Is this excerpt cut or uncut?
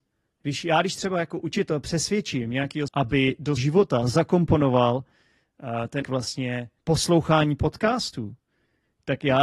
cut